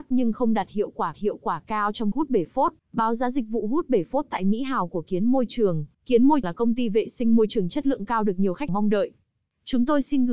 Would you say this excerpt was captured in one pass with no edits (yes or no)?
no